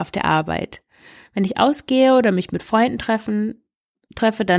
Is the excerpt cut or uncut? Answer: uncut